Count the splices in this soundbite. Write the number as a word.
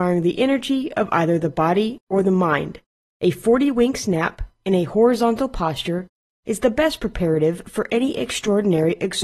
zero